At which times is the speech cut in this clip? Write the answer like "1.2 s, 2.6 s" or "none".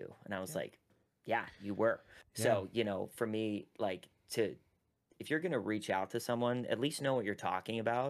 none

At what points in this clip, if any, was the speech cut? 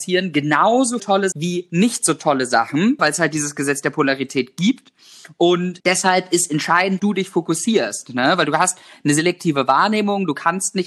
1.0 s, 1.3 s, 3.0 s, 5.8 s, 7.0 s

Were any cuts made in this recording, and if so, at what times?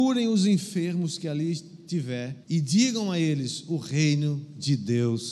2.4 s

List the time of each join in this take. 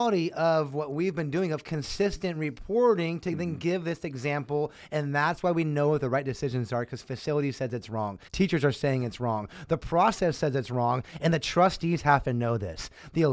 8.3 s

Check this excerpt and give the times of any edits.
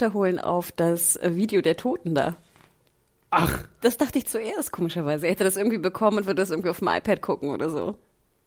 none

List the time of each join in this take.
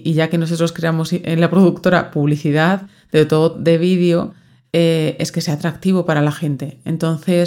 3.5 s

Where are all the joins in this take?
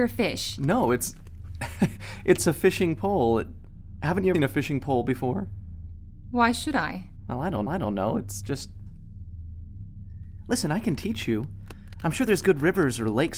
4.3 s, 7.7 s

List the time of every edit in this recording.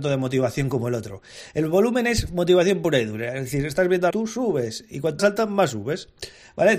4.1 s, 5.2 s

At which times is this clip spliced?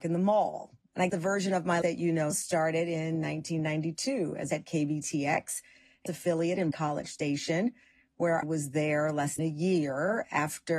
1.1 s, 1.8 s, 2.3 s, 4.5 s, 6.1 s, 6.7 s, 8.4 s, 9.4 s

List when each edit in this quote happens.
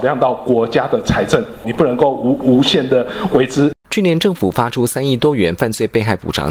1.6 s, 3.8 s

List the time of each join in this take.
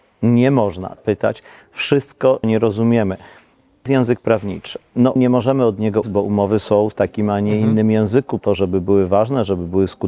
1.0 s, 2.4 s, 3.9 s, 5.2 s, 6.0 s, 6.9 s, 8.4 s

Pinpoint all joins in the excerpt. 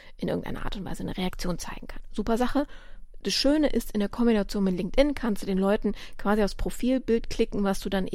none

